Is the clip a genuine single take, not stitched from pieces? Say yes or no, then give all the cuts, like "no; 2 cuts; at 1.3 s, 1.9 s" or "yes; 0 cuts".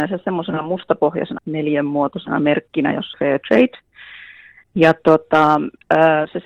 no; 2 cuts; at 1.4 s, 3.1 s